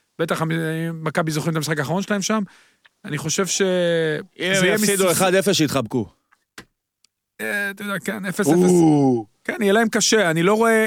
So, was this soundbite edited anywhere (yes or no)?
no